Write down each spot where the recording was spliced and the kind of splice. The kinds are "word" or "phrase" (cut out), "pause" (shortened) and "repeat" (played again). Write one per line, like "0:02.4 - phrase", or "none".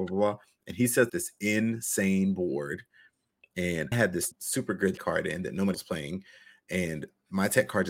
0:01.1 - word
0:03.9 - word
0:04.3 - word
0:05.0 - word
0:05.7 - word